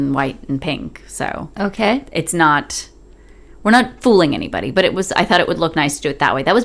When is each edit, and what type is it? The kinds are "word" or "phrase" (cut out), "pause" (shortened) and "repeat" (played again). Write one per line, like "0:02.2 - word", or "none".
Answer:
none